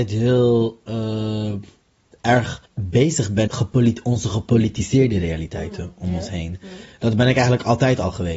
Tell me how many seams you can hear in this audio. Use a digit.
2